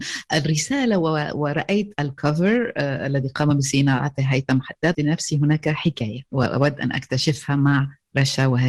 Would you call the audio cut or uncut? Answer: cut